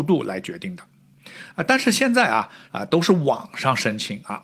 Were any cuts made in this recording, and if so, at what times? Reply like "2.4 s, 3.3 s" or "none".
2.7 s